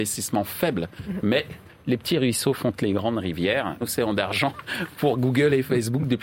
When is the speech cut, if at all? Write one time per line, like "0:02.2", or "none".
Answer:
0:03.8